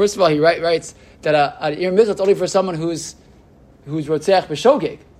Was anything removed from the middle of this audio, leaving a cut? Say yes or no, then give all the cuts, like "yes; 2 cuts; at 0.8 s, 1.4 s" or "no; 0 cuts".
no; 0 cuts